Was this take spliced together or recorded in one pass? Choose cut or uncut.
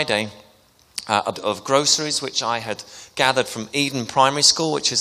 cut